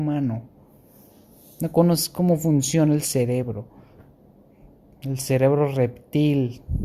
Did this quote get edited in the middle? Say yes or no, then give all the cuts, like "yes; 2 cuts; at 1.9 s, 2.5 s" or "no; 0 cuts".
no; 0 cuts